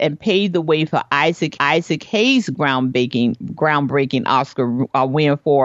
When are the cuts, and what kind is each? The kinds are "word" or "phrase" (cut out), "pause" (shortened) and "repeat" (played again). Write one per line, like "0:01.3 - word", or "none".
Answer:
0:01.6 - repeat